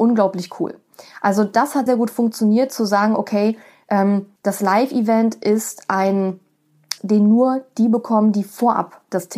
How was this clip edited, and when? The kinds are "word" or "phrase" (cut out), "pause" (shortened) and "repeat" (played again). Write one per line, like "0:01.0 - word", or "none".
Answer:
0:01.9 - word
0:04.4 - pause
0:07.0 - word

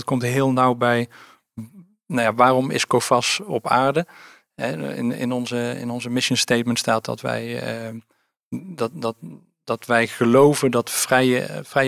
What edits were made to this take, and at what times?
none

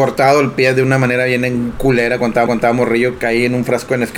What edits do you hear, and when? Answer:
0:02.5 - repeat

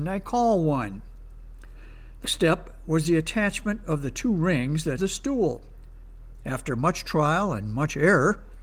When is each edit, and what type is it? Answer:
0:02.2 - word
0:05.0 - word

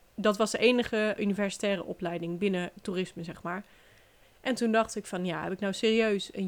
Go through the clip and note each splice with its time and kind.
0:01.2 - word

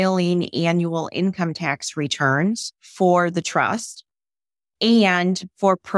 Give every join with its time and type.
none

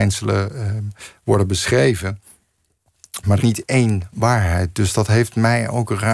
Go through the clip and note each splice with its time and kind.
0:03.4 - word

